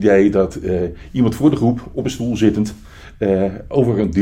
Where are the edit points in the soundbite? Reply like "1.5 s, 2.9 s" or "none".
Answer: none